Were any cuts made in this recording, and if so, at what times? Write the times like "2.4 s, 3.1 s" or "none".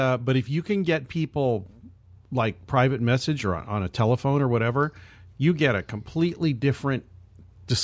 none